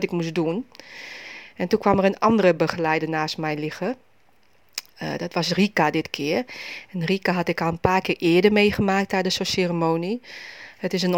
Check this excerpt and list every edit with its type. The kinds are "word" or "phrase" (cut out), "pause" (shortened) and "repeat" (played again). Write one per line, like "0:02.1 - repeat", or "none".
none

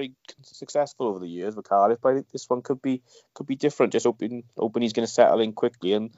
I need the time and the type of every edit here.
none

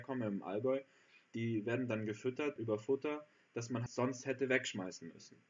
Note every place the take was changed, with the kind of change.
0:02.6 - word
0:03.9 - word

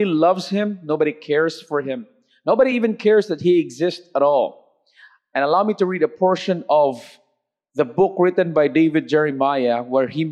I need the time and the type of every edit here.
none

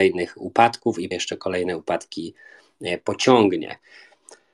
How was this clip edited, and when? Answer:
0:01.1 - word

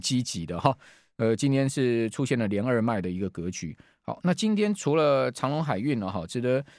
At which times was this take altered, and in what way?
none

